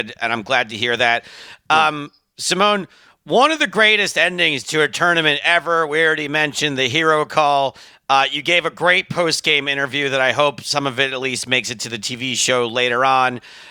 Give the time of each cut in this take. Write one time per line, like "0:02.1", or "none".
none